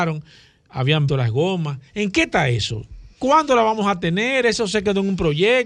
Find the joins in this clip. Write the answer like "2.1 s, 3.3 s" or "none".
1.1 s, 1.9 s, 3.1 s